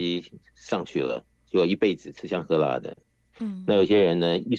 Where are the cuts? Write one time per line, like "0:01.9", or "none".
none